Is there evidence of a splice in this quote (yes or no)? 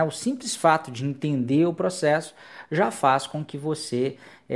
no